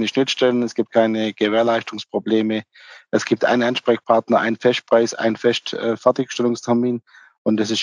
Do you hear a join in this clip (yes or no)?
no